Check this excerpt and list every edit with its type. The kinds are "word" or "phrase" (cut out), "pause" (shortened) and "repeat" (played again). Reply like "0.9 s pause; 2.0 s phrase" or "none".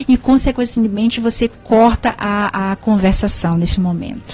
none